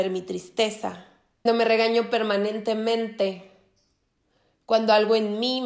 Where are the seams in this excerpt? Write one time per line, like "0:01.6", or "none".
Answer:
0:01.5